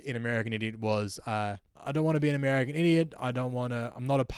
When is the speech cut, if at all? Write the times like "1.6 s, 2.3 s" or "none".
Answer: 1.7 s